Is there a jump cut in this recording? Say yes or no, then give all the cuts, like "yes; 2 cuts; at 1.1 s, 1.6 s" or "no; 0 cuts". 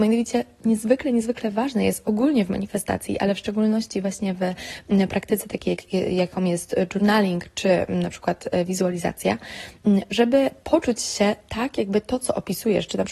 no; 0 cuts